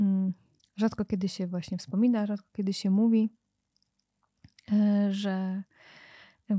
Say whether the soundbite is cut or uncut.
uncut